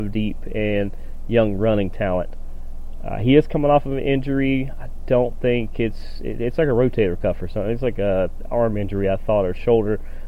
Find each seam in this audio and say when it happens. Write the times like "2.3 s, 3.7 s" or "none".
none